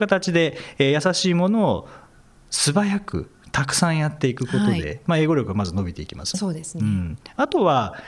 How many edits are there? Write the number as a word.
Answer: one